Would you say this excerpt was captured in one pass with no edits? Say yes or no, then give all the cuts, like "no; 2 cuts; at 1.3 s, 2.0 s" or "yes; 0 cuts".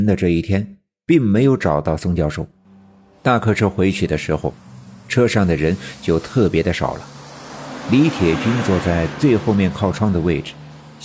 no; 1 cut; at 2.6 s